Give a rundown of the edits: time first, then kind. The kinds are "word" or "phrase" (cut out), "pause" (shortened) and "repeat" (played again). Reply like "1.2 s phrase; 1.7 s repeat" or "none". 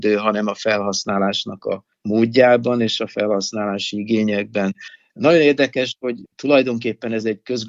none